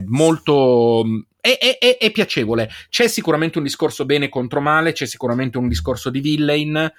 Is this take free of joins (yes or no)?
yes